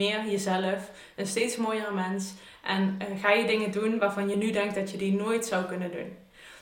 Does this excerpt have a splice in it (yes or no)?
no